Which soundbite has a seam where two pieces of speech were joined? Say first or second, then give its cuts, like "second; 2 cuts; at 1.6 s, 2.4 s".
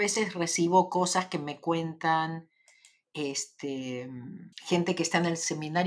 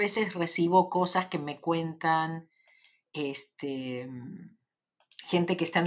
first; 1 cut; at 4.5 s